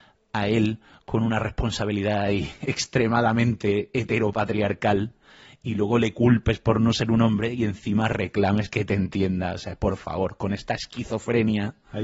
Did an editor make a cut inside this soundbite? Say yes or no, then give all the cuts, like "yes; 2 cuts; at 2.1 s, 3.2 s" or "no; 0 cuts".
no; 0 cuts